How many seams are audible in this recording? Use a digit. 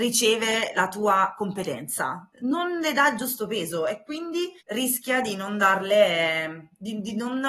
2